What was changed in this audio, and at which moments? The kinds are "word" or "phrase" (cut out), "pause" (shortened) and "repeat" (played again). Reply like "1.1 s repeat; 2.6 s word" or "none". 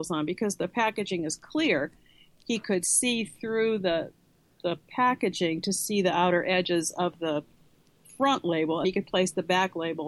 8.8 s word